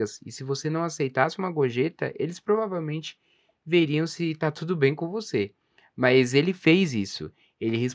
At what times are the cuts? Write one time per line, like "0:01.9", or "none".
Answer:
none